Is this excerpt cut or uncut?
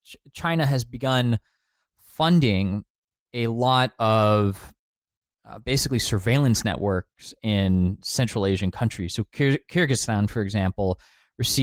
uncut